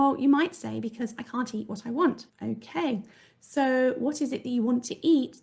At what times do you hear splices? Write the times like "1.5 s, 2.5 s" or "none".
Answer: 2.3 s